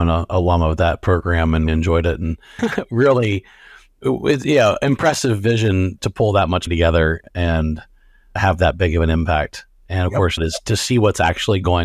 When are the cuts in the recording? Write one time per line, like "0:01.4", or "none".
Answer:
0:01.7
0:02.6
0:06.0
0:06.7
0:08.4
0:10.4